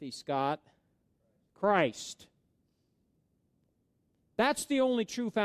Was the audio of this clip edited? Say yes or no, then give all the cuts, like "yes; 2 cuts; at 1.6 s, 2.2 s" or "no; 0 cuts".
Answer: no; 0 cuts